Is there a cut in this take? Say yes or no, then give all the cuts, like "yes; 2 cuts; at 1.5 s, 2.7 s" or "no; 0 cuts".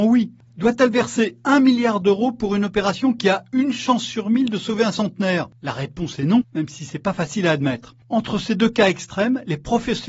no; 0 cuts